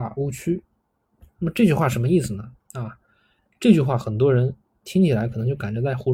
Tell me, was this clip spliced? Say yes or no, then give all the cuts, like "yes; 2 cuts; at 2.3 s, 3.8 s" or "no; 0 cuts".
yes; 1 cut; at 2.6 s